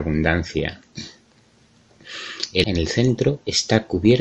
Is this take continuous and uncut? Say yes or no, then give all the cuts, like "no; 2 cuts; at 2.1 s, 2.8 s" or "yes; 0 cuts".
no; 1 cut; at 2.6 s